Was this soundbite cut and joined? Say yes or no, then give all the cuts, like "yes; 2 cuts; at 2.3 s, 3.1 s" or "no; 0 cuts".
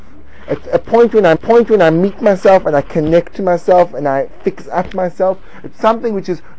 yes; 1 cut; at 1.4 s